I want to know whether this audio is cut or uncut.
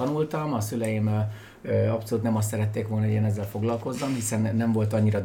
uncut